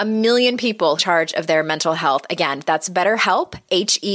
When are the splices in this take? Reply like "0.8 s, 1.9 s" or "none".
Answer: 1.0 s